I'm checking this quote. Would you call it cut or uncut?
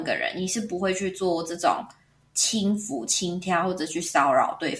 uncut